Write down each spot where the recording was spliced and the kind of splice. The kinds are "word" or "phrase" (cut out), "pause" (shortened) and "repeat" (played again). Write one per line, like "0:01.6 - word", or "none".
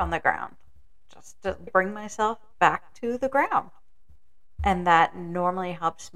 0:01.7 - word